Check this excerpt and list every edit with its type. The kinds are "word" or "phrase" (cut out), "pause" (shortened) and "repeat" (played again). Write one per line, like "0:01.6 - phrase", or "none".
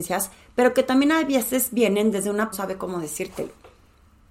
0:02.5 - phrase

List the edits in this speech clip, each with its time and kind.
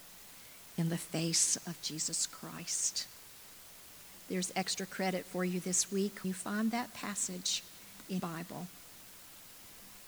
0:06.2 - word
0:08.2 - word

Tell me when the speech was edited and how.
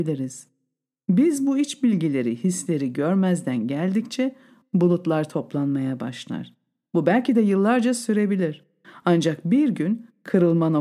none

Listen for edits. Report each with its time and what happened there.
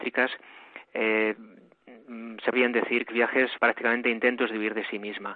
0:02.5 - word
0:03.1 - word
0:03.6 - word

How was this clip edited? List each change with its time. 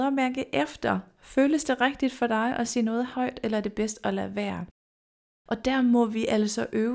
none

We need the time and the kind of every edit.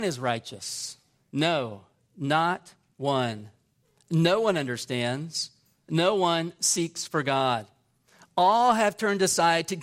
none

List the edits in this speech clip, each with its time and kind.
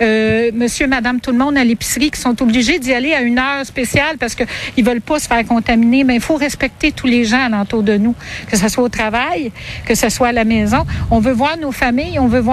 none

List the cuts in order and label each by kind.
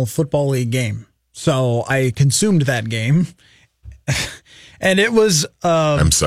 none

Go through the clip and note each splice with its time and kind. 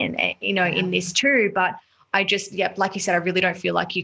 none

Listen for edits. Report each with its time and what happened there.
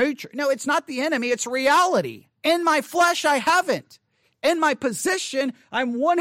0:02.4 - pause

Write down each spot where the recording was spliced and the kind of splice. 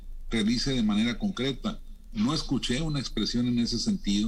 none

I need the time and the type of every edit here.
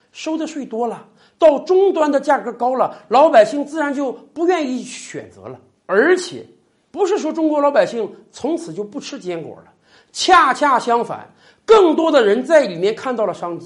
none

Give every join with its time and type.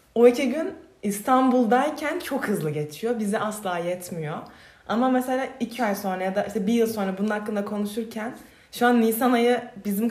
0:05.8 - word

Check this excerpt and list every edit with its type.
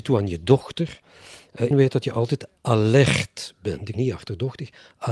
0:01.7 - word
0:03.9 - word

